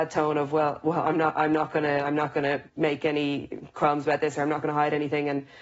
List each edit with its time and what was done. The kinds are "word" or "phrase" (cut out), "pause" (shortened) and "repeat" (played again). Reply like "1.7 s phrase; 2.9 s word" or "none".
2.7 s pause